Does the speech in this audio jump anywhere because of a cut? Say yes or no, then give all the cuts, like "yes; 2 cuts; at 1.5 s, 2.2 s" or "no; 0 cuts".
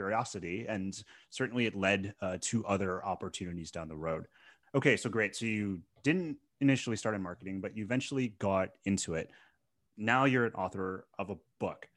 no; 0 cuts